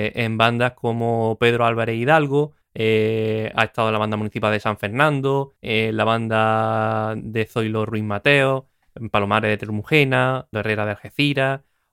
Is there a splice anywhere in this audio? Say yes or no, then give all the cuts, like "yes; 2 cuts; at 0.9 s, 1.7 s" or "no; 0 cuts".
yes; 3 cuts; at 2.6 s, 5.6 s, 10.5 s